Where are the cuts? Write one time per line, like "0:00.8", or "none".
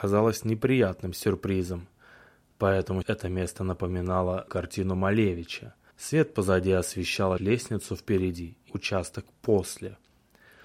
0:03.0
0:04.5
0:05.9
0:07.4
0:08.7